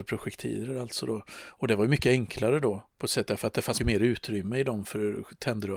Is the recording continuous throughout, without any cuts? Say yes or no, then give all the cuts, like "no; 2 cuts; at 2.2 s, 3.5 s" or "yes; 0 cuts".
no; 2 cuts; at 2.9 s, 3.8 s